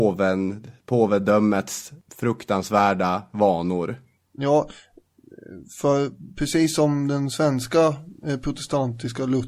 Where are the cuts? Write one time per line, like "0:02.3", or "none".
none